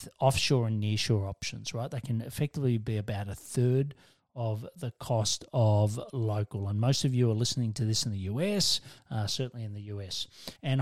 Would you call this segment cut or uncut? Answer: uncut